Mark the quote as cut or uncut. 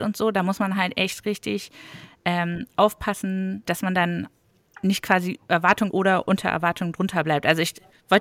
cut